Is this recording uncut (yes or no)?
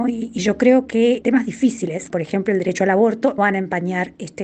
no